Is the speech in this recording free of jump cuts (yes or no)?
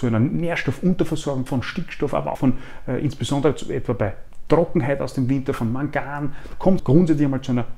no